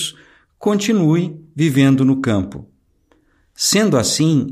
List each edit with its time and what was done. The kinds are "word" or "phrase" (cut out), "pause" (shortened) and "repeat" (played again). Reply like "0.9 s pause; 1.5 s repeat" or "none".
none